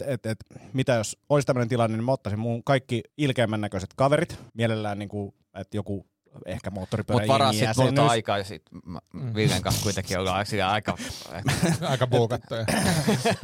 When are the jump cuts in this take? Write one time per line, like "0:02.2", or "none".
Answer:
0:01.2
0:03.1
0:04.5